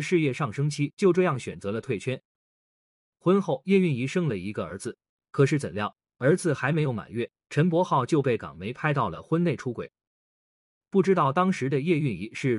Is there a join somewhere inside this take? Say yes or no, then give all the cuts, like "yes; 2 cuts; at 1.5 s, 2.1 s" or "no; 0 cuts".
no; 0 cuts